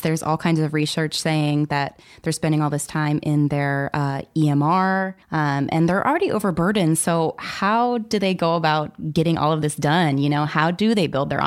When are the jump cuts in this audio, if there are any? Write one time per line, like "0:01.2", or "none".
0:05.2